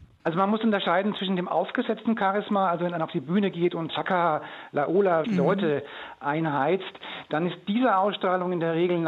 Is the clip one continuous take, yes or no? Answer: no